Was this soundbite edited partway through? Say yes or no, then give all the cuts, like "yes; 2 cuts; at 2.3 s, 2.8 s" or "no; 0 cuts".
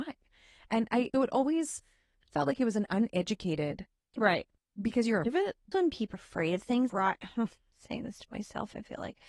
yes; 7 cuts; at 1.1 s, 2.3 s, 4.1 s, 5.2 s, 5.7 s, 6.1 s, 6.9 s